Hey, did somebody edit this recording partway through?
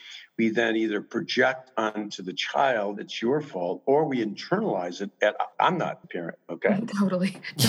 yes; 2 cuts; at 5.5 s, 6.0 s

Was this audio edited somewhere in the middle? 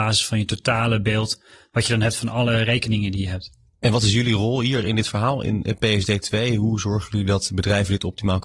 no; 0 cuts

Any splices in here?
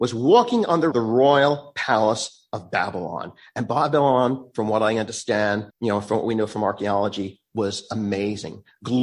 yes; 2 cuts; at 0.9 s, 5.7 s

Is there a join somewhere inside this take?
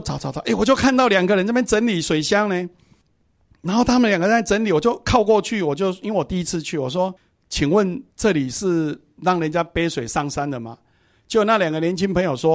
yes; 2 cuts; at 7.2 s, 8.1 s

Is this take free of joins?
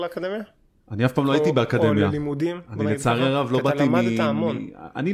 yes; 0 cuts

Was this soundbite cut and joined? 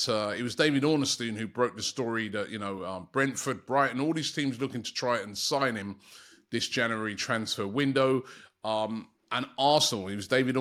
no; 0 cuts

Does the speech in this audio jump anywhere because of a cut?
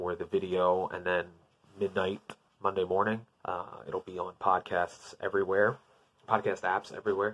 yes; 2 cuts; at 2.5 s, 3.3 s

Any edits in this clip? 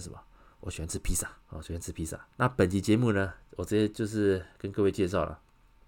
yes; 3 cuts; at 1.4 s, 2.3 s, 4.5 s

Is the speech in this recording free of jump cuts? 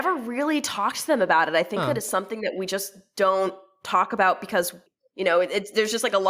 yes; 0 cuts

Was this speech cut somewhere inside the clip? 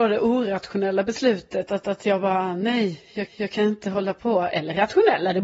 yes; 2 cuts; at 1.8 s, 3.3 s

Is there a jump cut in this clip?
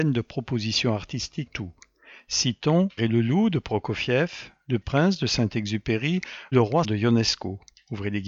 yes; 5 cuts; at 1.5 s, 3.0 s, 4.8 s, 6.5 s, 6.8 s

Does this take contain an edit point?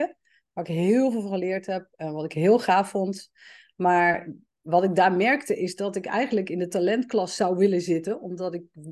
no; 0 cuts

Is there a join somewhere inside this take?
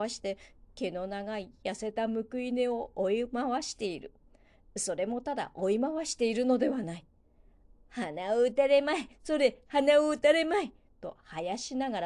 no; 0 cuts

